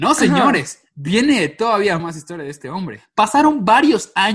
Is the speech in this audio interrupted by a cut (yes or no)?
yes